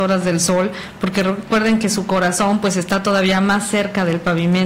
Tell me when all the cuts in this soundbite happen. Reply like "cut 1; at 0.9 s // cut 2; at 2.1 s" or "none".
none